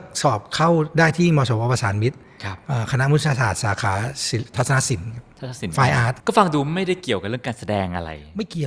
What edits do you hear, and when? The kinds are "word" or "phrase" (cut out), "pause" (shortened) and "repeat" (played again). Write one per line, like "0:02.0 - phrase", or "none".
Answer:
0:06.2 - pause

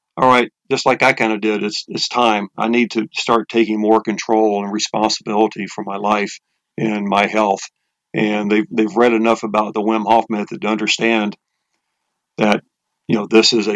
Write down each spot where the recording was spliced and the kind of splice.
none

